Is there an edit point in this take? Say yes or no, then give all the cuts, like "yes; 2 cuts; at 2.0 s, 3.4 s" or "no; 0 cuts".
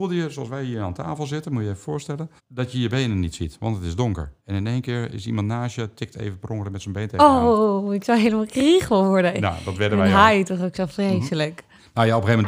yes; 2 cuts; at 2.4 s, 4.4 s